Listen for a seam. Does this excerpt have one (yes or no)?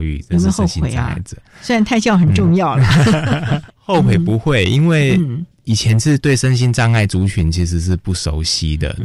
yes